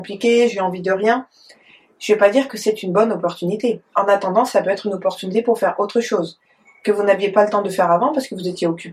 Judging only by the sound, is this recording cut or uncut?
uncut